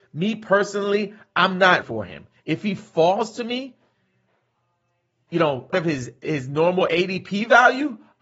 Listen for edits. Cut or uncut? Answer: cut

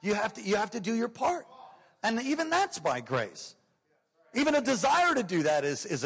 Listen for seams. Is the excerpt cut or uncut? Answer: uncut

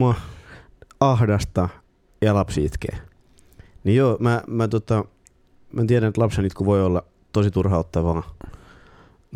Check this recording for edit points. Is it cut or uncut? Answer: uncut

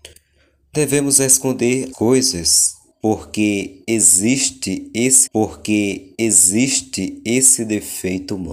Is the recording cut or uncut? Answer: cut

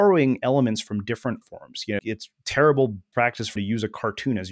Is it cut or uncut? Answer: cut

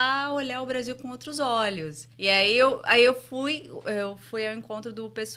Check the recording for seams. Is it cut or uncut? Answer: cut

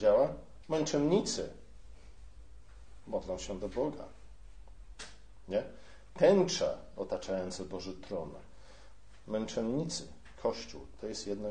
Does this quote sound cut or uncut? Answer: uncut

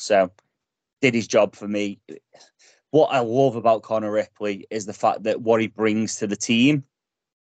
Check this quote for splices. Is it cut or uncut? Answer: uncut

